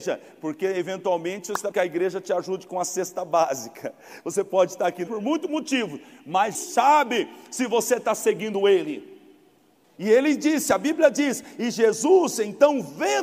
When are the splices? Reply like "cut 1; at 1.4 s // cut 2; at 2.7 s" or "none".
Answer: cut 1; at 1.7 s // cut 2; at 5.1 s // cut 3; at 6.5 s